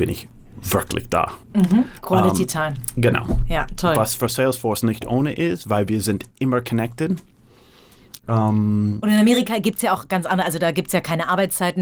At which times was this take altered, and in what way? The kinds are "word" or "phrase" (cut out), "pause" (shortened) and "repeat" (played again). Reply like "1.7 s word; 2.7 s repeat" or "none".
1.4 s pause